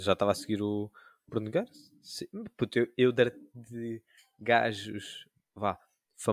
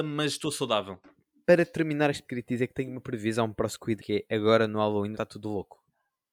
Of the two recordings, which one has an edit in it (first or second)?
second